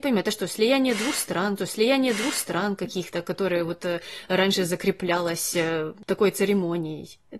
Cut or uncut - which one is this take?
cut